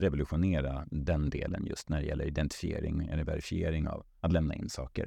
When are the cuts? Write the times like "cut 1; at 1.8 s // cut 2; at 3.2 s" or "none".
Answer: none